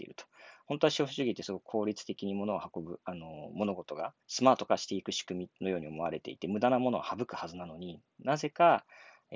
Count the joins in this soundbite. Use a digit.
1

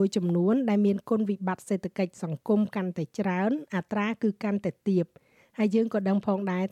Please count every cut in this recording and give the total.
0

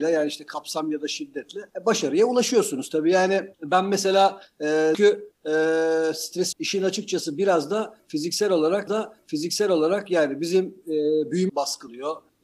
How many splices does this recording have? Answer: 5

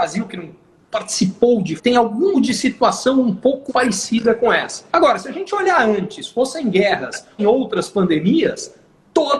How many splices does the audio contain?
5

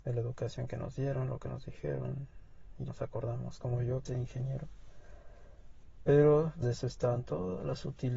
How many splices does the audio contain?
3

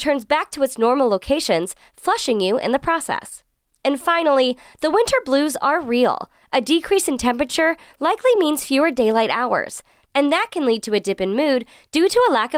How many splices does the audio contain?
0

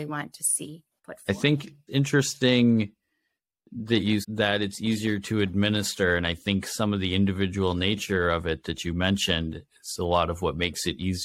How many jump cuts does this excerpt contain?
3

